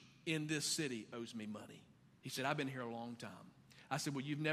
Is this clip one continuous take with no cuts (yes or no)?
yes